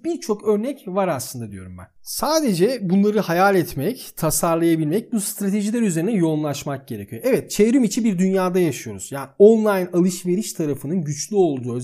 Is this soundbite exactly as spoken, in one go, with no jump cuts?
yes; 0 cuts

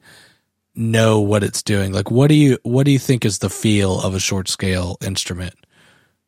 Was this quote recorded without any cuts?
yes; 0 cuts

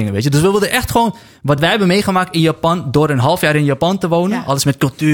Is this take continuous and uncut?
yes; 0 cuts

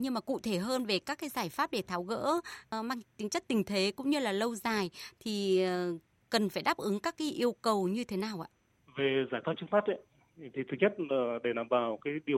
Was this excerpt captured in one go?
yes; 0 cuts

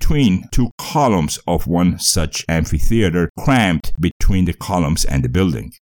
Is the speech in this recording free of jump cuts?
yes; 0 cuts

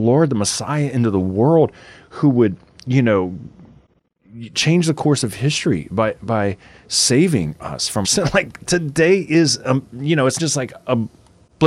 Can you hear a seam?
yes; 2 cuts; at 8.0 s, 10.4 s

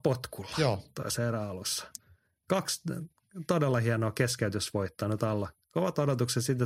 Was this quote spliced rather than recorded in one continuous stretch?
no; 0 cuts

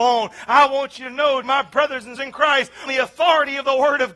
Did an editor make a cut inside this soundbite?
yes; 3 cuts; at 1.4 s, 2.2 s, 2.9 s

